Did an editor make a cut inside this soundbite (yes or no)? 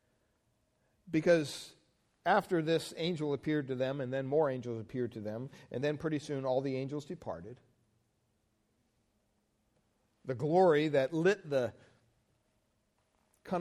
no